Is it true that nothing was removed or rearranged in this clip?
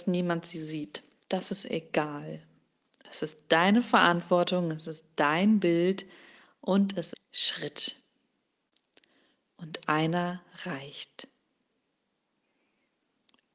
no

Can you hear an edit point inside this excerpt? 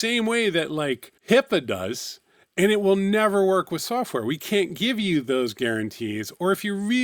yes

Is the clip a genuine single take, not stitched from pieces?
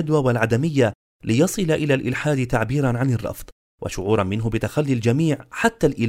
yes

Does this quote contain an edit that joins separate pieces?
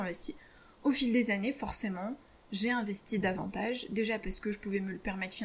no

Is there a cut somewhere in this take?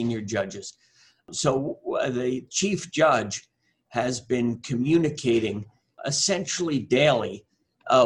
no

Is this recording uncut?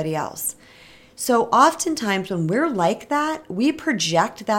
yes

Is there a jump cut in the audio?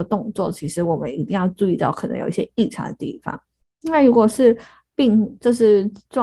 no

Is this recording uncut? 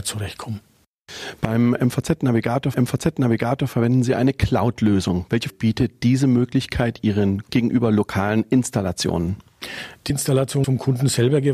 no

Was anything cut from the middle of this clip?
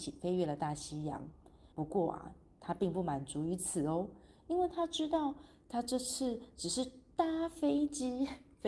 yes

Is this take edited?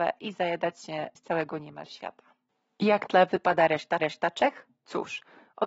yes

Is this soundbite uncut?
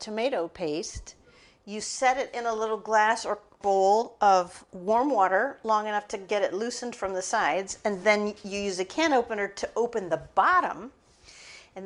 yes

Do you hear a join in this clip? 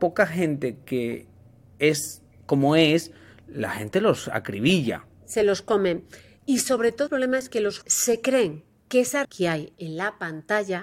yes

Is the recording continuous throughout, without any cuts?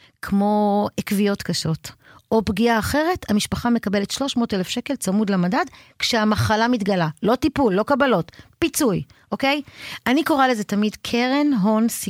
yes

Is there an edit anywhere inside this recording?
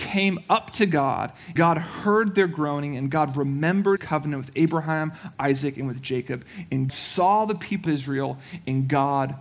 yes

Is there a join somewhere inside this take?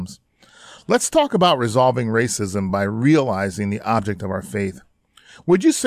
no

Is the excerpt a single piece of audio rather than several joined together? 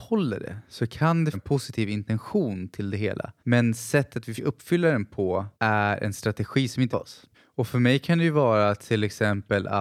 no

